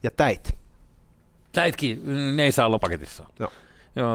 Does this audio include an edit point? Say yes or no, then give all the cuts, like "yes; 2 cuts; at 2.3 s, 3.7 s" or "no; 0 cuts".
yes; 1 cut; at 2.8 s